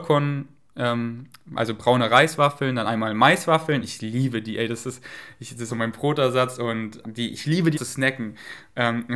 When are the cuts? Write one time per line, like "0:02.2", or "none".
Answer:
0:05.7
0:07.0
0:07.7